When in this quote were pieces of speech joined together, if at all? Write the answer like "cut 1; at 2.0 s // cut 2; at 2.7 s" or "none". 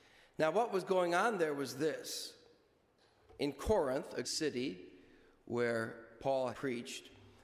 cut 1; at 3.4 s // cut 2; at 4.2 s // cut 3; at 6.5 s

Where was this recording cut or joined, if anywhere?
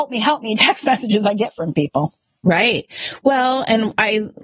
none

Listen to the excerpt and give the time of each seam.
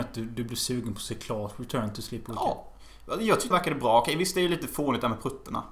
cut 1; at 3.5 s

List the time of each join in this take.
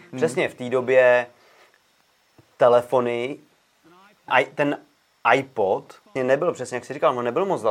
cut 1; at 4.3 s // cut 2; at 6.2 s

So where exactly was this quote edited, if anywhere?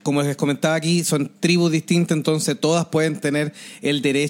none

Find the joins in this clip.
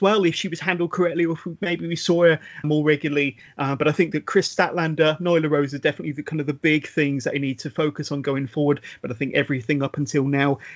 cut 1; at 2.6 s

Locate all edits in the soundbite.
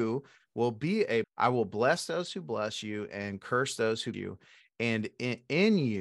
cut 1; at 1.2 s // cut 2; at 4.1 s

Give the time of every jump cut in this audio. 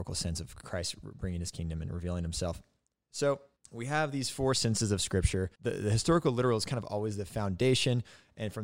cut 1; at 3.6 s // cut 2; at 5.5 s

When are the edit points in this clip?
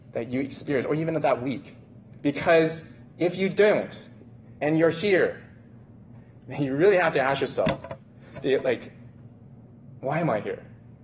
cut 1; at 2.2 s // cut 2; at 4.6 s

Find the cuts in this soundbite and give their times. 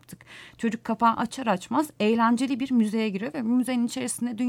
none

